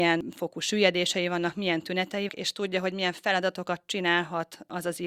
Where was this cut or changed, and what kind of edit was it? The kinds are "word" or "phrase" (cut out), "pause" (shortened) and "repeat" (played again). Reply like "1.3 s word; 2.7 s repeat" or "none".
2.3 s word